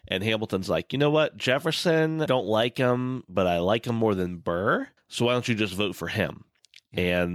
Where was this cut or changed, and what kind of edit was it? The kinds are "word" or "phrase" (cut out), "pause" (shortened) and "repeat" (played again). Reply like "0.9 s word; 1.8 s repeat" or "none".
2.3 s phrase; 5.0 s pause